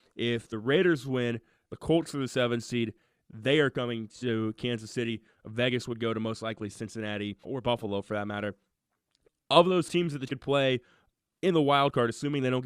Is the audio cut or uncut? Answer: cut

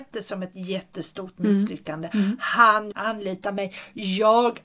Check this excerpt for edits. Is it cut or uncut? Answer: cut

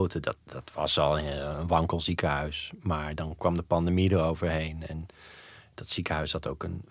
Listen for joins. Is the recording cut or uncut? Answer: uncut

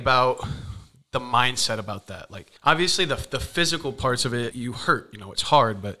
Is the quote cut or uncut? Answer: cut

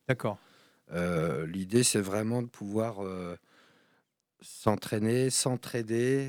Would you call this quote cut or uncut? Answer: uncut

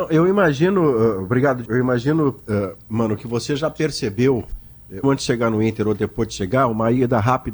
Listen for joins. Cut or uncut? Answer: cut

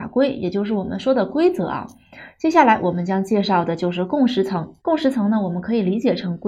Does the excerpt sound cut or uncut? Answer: cut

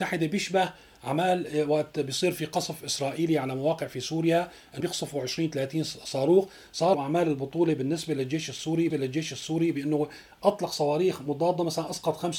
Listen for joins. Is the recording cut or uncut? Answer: cut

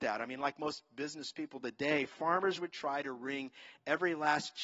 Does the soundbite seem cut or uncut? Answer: uncut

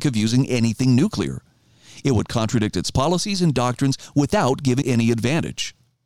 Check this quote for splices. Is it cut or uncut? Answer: cut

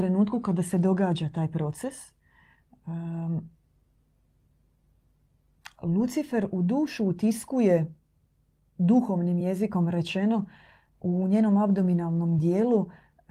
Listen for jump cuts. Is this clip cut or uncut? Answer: uncut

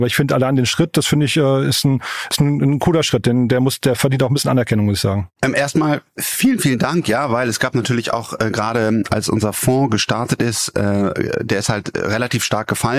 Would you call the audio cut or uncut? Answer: uncut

